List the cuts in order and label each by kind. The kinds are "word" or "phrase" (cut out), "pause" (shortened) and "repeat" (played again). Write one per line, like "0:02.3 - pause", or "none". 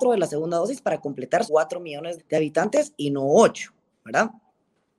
0:01.5 - word
0:02.2 - word